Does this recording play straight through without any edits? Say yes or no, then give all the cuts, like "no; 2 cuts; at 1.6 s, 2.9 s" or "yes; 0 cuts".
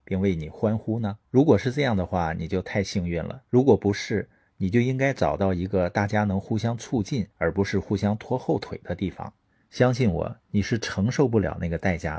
no; 4 cuts; at 1.2 s, 3.4 s, 7.3 s, 9.4 s